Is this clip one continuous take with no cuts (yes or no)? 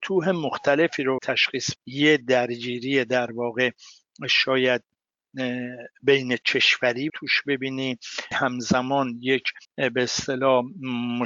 no